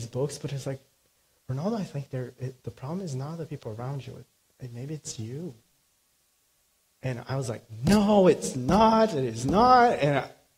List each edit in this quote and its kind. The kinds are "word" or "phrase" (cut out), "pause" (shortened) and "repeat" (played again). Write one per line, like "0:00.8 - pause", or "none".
none